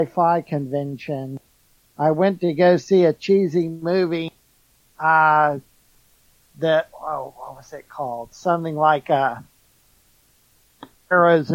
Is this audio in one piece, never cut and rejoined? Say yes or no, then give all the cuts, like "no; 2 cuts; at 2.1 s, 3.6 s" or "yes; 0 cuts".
yes; 0 cuts